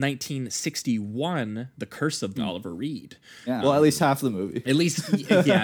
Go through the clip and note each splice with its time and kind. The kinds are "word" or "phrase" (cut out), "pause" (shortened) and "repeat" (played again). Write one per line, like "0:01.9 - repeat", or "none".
0:01.7 - pause
0:02.4 - phrase
0:03.6 - word